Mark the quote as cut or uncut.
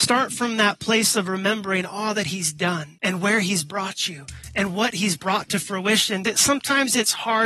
cut